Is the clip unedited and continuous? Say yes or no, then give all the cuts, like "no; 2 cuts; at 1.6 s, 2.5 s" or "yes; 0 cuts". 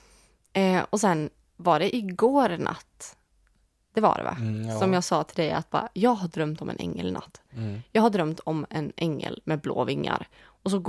yes; 0 cuts